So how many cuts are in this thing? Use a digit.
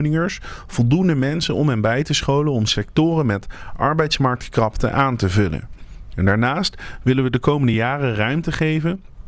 0